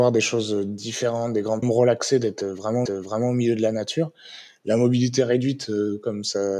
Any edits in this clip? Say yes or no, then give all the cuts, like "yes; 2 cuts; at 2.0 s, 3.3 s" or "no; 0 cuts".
yes; 2 cuts; at 1.6 s, 2.9 s